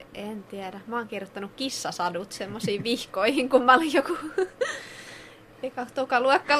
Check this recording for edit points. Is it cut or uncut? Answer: uncut